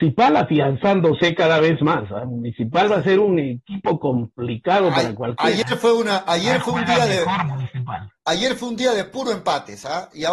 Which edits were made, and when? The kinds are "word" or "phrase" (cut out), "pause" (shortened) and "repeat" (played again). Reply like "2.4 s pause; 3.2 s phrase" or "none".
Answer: 8.2 s pause